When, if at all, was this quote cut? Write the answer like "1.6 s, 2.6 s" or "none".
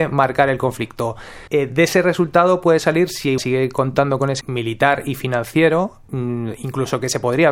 1.5 s, 3.4 s, 4.4 s